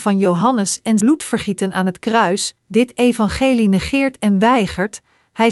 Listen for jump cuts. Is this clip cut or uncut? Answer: cut